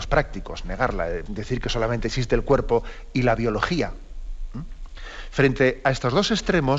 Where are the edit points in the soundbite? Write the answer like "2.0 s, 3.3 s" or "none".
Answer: 1.3 s